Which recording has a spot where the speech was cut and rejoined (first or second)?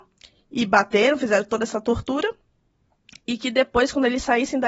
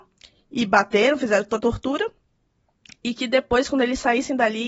second